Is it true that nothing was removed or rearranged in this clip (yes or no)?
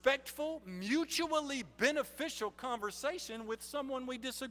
yes